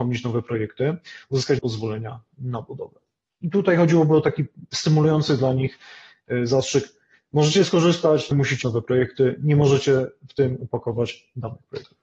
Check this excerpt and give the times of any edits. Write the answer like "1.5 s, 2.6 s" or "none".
1.6 s, 8.3 s, 8.6 s